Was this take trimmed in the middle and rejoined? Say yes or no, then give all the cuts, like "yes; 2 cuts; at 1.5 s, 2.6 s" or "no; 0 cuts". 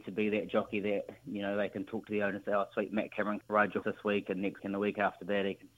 yes; 3 cuts; at 3.4 s, 3.8 s, 4.6 s